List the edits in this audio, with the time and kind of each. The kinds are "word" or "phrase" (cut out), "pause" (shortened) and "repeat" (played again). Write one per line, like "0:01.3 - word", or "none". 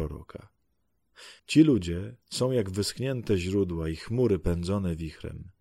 0:01.4 - pause
0:02.2 - pause